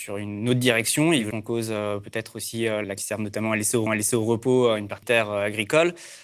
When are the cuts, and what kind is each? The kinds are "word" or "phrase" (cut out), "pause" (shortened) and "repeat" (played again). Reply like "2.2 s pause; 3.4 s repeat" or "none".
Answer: 1.3 s word; 3.0 s phrase; 3.9 s repeat; 5.0 s word